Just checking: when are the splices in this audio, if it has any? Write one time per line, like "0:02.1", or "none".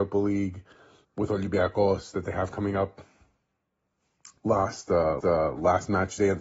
0:01.0
0:05.2